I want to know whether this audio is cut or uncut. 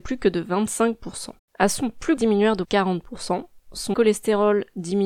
cut